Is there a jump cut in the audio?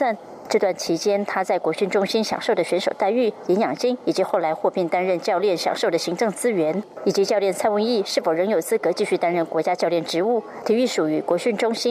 no; 0 cuts

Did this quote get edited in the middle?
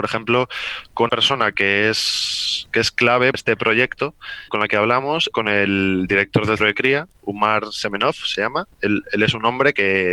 yes; 6 cuts; at 1.1 s, 3.3 s, 4.5 s, 5.3 s, 6.6 s, 7.1 s

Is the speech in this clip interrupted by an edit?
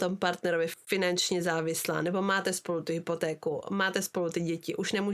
no; 0 cuts

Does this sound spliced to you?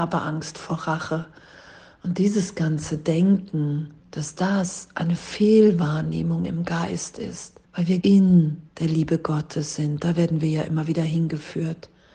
yes; 4 cuts; at 4.0 s, 7.6 s, 8.0 s, 8.7 s

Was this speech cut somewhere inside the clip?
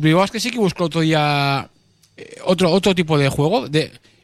no; 0 cuts

